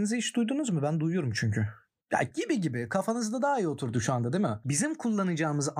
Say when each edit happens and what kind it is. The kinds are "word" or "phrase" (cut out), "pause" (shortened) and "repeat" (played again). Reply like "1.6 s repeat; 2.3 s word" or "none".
none